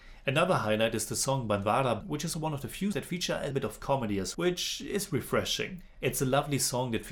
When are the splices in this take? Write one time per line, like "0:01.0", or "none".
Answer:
0:02.0
0:02.3
0:02.9
0:03.5
0:04.3